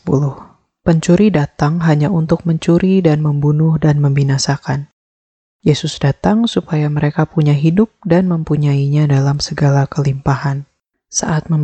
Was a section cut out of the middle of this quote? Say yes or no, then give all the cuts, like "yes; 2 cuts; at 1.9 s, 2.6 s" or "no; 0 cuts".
no; 0 cuts